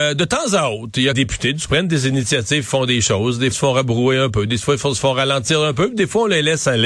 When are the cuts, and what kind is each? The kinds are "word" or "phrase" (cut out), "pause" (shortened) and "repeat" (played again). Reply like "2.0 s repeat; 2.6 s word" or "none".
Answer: 1.1 s phrase; 1.7 s phrase; 3.5 s word